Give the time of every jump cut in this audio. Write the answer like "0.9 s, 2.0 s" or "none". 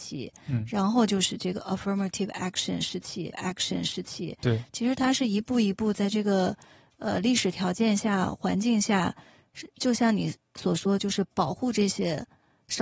3.3 s